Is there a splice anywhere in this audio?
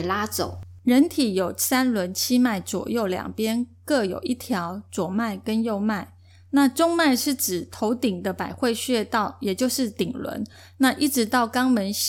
no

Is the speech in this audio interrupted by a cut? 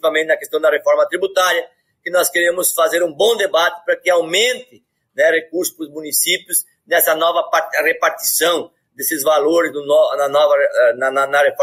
no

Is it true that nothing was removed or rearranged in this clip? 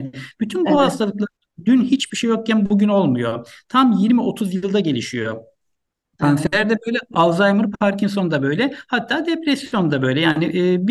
yes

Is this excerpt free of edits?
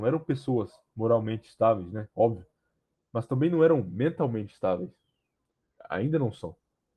yes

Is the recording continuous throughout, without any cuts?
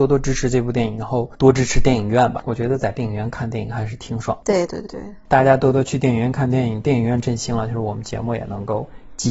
no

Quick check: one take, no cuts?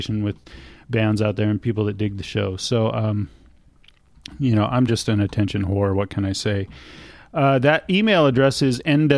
yes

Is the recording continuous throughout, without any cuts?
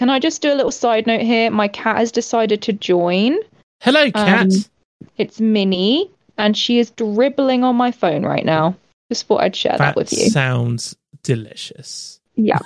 yes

